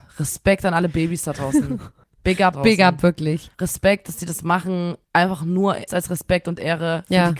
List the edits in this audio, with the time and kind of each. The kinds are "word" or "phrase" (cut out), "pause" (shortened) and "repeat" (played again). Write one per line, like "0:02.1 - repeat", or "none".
0:02.0 - pause
0:02.5 - phrase
0:03.5 - pause
0:05.0 - pause
0:05.9 - word